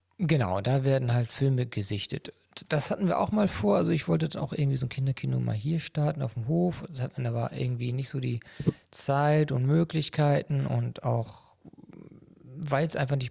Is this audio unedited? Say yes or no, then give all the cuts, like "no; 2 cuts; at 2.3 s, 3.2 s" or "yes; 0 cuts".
yes; 0 cuts